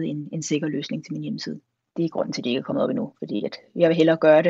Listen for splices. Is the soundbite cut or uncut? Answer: uncut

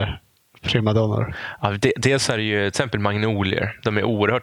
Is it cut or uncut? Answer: uncut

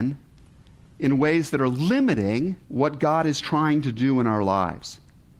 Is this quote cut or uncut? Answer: cut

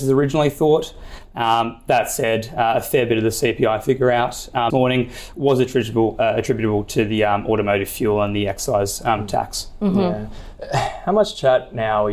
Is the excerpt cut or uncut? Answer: cut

